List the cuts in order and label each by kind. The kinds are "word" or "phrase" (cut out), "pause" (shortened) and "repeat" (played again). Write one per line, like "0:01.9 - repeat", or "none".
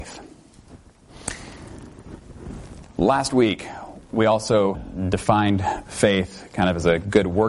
0:02.9 - pause
0:04.7 - word